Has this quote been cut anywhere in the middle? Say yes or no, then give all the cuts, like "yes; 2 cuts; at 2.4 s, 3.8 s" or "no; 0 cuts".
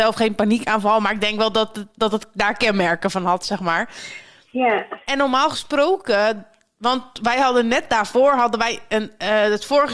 no; 0 cuts